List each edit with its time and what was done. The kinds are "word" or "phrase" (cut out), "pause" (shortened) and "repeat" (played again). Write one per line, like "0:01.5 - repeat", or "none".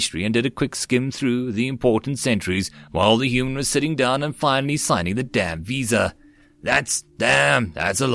none